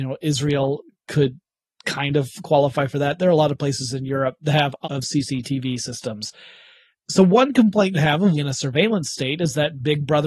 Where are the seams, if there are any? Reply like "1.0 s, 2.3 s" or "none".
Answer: 4.8 s, 7.9 s, 8.4 s